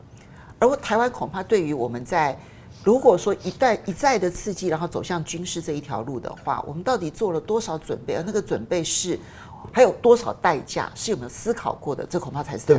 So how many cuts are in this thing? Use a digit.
0